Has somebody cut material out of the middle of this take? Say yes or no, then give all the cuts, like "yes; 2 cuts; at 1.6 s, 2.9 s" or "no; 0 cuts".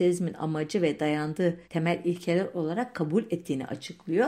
yes; 1 cut; at 1.6 s